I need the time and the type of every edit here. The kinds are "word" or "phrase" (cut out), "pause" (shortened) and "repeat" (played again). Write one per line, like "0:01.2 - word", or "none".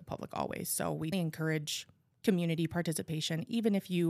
0:01.1 - word